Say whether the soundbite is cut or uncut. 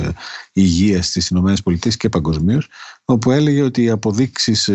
uncut